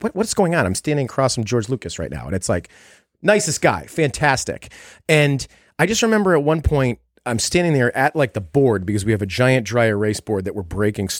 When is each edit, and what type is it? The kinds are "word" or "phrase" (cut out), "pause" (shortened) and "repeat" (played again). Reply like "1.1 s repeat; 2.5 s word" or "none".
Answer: none